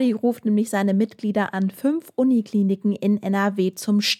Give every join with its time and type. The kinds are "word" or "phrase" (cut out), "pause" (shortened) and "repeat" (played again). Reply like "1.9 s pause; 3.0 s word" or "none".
none